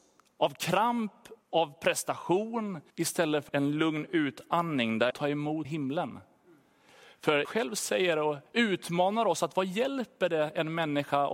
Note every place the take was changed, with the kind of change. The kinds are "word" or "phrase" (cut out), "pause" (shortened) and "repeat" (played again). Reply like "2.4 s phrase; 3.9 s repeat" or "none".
1.4 s pause; 2.9 s pause; 3.5 s word; 5.1 s phrase; 5.6 s word; 7.4 s word; 8.5 s pause